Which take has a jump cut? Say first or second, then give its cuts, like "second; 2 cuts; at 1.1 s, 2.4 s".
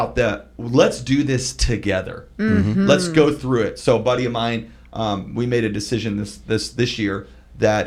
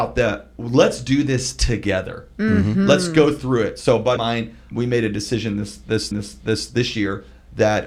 second; 3 cuts; at 4.2 s, 4.7 s, 6.1 s